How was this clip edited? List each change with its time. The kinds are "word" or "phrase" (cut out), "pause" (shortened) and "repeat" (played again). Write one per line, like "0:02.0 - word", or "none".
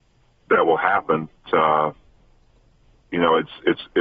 0:01.4 - word